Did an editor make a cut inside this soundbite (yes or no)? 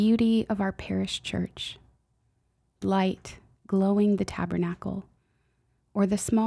yes